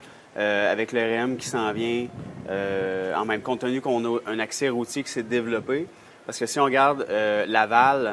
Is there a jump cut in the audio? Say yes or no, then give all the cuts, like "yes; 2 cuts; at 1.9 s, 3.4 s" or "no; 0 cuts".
yes; 1 cut; at 3.4 s